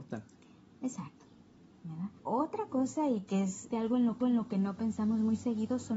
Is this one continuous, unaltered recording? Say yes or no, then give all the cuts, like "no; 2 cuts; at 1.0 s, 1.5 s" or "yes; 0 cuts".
no; 4 cuts; at 1.7 s, 2.2 s, 3.7 s, 4.2 s